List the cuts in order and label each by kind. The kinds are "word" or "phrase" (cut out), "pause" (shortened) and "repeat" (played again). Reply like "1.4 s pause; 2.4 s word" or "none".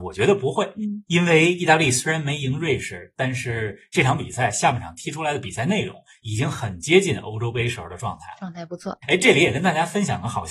none